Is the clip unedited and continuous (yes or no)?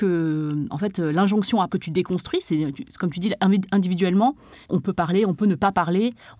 no